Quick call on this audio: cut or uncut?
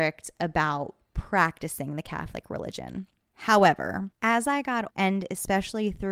cut